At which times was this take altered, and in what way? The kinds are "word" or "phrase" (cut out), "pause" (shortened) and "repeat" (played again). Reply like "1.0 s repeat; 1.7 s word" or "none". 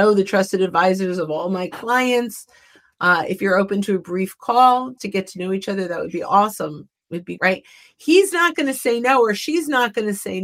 5.0 s word; 7.4 s word